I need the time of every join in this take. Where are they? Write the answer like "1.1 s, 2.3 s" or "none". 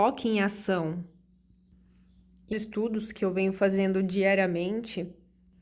2.5 s